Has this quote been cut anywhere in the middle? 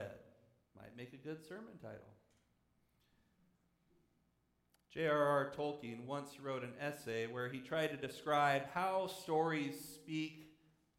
no; 0 cuts

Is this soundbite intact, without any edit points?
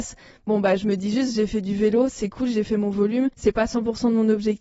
no; 1 cut; at 3.3 s

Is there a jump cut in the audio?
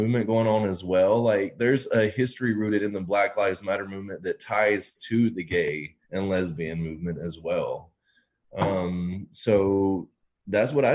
yes; 1 cut; at 6.0 s

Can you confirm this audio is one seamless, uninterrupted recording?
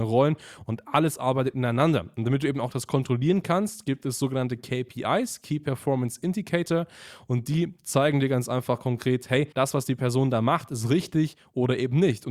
no; 1 cut; at 9.5 s

